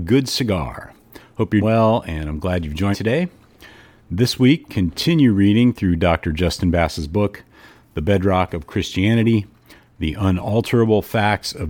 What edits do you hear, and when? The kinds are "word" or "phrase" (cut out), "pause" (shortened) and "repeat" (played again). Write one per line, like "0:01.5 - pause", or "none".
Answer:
0:01.6 - word
0:02.9 - word
0:04.7 - word